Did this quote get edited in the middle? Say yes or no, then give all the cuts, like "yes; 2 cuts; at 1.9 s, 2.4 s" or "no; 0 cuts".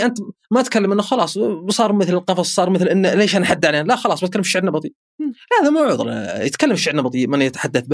no; 0 cuts